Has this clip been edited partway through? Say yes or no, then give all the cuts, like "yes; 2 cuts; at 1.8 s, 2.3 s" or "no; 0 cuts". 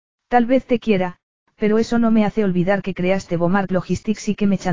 no; 0 cuts